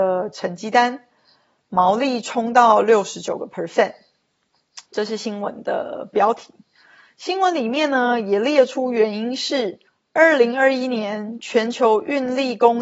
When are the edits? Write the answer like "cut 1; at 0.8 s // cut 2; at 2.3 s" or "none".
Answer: cut 1; at 4.9 s // cut 2; at 9.9 s